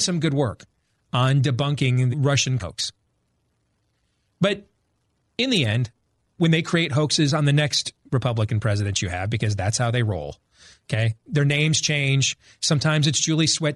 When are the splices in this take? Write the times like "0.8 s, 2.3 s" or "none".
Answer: 2.1 s, 2.6 s, 6.4 s